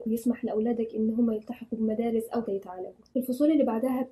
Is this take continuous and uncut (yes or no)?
no